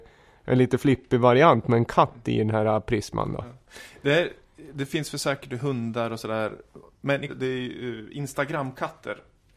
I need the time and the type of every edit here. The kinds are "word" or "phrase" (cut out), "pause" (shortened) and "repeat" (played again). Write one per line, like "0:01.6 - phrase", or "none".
0:07.3 - word